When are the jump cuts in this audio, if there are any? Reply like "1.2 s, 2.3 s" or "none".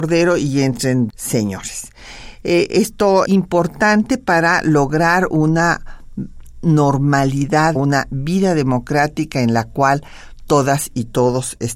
1.1 s, 3.2 s, 7.7 s